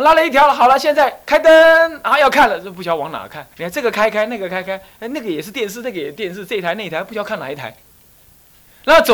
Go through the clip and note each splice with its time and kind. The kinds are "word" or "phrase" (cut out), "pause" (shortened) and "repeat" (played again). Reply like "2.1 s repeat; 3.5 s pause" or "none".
3.5 s pause